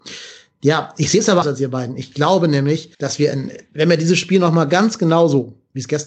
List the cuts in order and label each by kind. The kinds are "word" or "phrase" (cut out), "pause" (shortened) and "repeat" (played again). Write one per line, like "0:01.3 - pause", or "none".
0:01.4 - word
0:02.9 - pause